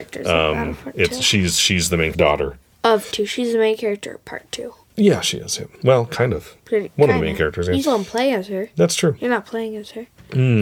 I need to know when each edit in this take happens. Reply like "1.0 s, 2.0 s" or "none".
2.1 s, 3.1 s, 4.8 s, 5.7 s, 6.6 s, 7.8 s